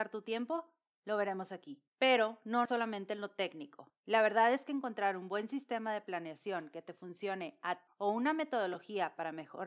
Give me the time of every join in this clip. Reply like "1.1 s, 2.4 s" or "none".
1.9 s, 2.7 s, 7.9 s